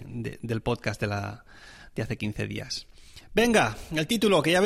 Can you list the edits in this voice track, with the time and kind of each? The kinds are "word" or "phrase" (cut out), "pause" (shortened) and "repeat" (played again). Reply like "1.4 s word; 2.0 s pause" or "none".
none